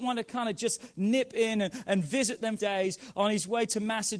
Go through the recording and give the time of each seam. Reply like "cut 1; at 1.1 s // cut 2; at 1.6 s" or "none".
cut 1; at 2.6 s